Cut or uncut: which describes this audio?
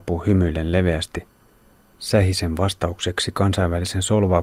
uncut